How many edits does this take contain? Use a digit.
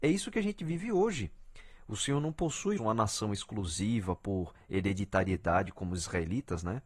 1